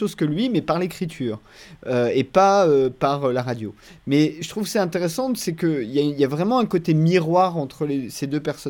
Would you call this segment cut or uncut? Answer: uncut